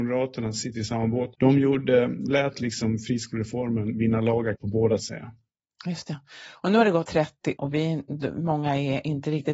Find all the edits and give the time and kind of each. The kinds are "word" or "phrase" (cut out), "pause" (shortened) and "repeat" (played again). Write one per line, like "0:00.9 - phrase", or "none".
0:01.3 - pause
0:02.3 - word
0:04.6 - word
0:05.0 - phrase
0:07.0 - word
0:07.6 - word